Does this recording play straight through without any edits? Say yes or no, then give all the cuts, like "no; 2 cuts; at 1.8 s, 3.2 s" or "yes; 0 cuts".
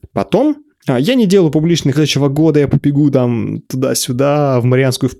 no; 1 cut; at 1.9 s